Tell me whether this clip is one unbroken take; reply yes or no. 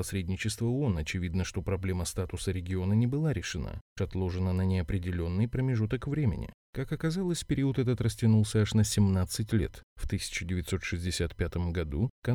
no